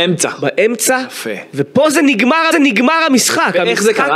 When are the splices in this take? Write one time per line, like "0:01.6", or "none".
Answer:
0:02.5